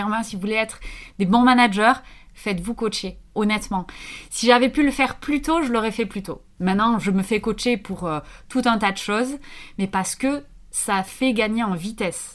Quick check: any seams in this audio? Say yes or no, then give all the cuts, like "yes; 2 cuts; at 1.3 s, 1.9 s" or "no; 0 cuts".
no; 0 cuts